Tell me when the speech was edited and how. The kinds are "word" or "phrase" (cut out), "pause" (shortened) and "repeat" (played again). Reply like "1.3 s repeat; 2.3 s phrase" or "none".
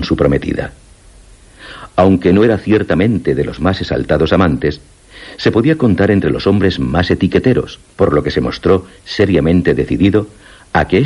7.9 s pause